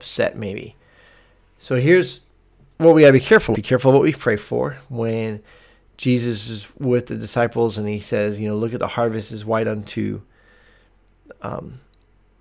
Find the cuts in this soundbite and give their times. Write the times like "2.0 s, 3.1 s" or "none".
3.5 s